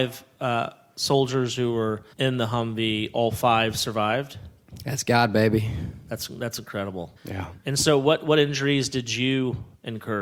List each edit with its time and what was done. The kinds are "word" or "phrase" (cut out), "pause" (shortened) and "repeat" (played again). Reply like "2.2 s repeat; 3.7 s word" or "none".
2.1 s pause; 7.2 s pause